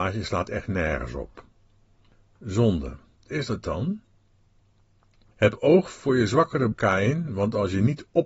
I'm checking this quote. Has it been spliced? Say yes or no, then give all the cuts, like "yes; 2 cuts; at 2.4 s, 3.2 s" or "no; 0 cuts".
yes; 2 cuts; at 3.3 s, 6.7 s